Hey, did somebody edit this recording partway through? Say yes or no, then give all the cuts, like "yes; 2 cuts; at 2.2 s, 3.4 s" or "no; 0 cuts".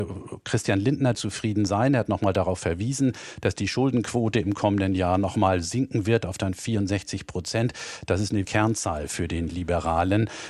yes; 2 cuts; at 1.1 s, 8.4 s